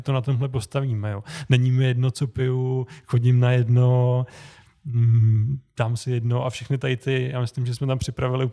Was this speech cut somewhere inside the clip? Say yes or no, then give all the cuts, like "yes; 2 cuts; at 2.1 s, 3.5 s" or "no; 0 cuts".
no; 0 cuts